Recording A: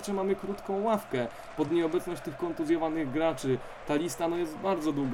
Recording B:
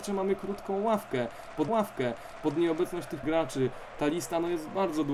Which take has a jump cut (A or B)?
B